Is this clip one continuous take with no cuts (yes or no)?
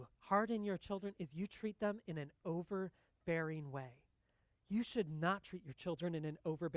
yes